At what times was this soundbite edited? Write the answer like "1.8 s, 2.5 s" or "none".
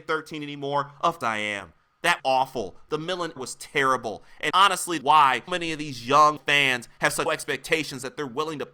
1.2 s, 2.2 s, 3.4 s, 4.5 s, 5.0 s, 5.5 s, 6.4 s, 7.3 s